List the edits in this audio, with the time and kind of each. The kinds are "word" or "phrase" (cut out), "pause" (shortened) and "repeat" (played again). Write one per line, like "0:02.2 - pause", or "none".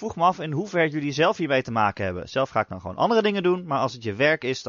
none